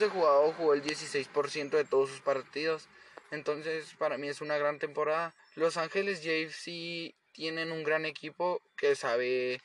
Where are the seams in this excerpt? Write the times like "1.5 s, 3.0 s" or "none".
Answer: 5.4 s